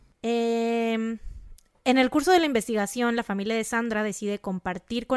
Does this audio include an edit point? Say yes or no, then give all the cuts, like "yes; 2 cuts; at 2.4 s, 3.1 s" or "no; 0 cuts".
no; 0 cuts